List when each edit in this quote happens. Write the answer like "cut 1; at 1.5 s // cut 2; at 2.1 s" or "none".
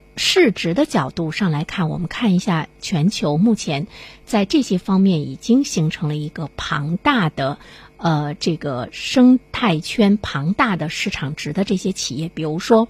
none